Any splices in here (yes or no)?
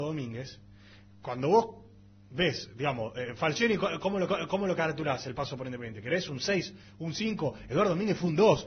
yes